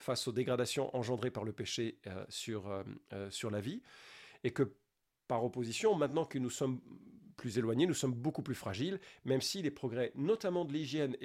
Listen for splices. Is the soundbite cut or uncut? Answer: uncut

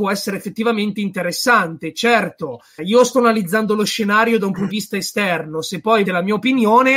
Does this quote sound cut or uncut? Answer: cut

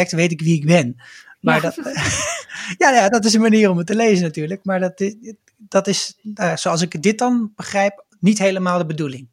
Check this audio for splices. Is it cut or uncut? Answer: uncut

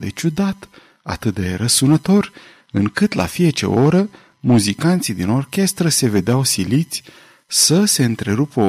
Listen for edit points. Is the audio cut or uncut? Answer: uncut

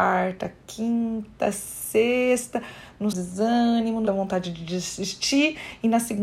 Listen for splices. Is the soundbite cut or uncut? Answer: cut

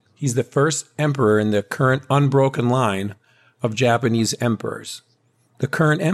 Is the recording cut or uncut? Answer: uncut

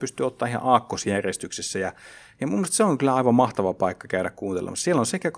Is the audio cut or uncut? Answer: uncut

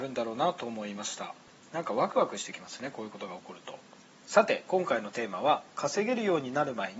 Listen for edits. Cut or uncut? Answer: uncut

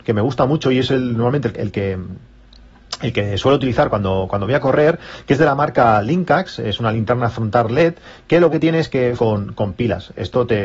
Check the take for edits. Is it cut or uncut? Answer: cut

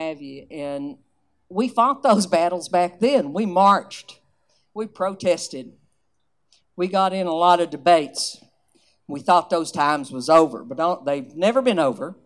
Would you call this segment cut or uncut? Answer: uncut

